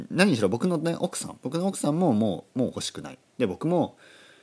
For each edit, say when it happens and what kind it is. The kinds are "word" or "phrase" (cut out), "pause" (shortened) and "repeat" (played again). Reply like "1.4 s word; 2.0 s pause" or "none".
1.4 s pause; 3.3 s pause